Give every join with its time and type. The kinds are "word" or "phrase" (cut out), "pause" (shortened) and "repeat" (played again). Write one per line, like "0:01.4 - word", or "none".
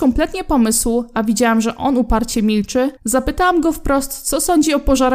0:03.0 - pause

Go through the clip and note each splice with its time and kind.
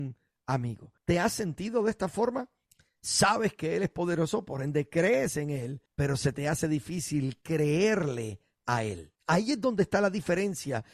0:01.0 - pause
0:02.7 - pause
0:05.9 - pause
0:09.2 - pause

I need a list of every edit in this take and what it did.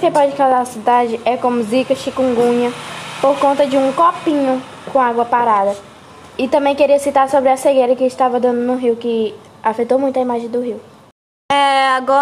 none

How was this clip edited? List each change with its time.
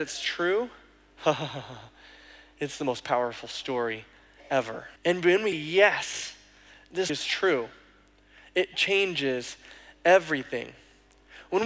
0:05.0 - pause
0:05.5 - word
0:07.1 - word

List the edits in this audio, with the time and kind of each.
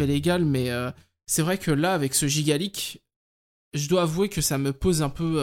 none

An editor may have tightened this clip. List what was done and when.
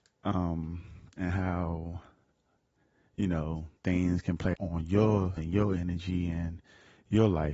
0:01.1 - pause
0:03.8 - word
0:04.5 - phrase
0:05.4 - word

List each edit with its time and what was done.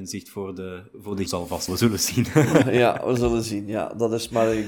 0:01.3 - word
0:01.7 - word
0:02.6 - word

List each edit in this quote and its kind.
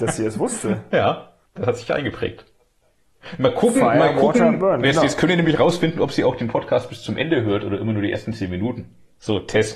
0:01.5 - pause

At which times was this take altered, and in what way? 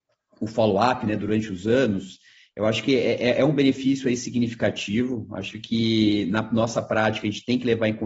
none

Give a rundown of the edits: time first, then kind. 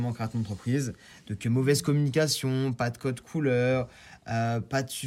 none

